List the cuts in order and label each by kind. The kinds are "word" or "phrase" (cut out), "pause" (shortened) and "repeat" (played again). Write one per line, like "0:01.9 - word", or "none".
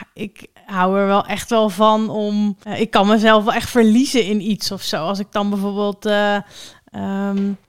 0:02.6 - pause

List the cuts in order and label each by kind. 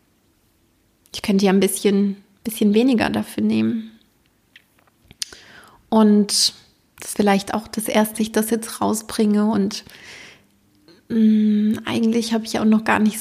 0:07.1 - phrase
0:08.2 - phrase

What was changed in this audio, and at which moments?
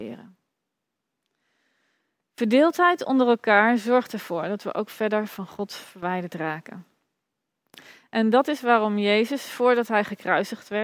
none

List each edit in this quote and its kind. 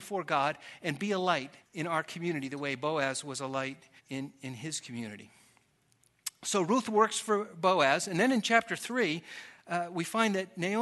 0:01.6 - pause
0:04.0 - pause

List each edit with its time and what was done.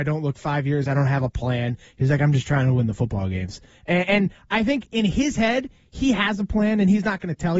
none

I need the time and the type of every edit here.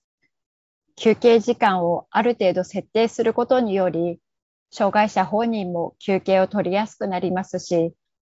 none

